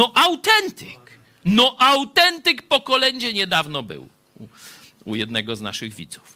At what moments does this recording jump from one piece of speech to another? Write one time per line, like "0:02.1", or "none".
none